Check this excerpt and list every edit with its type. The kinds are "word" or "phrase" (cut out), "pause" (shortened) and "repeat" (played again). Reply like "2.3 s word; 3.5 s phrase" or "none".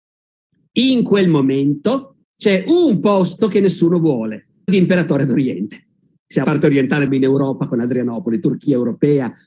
2.2 s pause; 4.7 s word; 6.4 s word; 7.1 s phrase